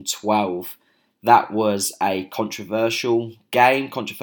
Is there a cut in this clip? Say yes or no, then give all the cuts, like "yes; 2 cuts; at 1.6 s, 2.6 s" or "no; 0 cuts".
no; 0 cuts